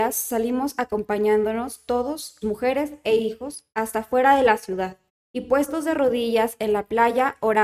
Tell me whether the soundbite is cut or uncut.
cut